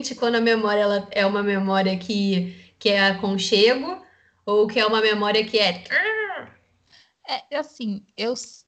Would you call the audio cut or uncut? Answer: uncut